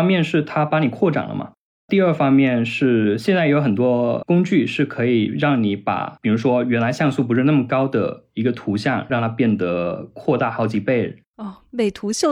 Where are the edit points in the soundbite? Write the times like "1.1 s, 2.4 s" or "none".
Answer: none